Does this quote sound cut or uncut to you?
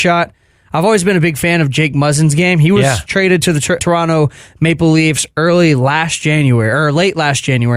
cut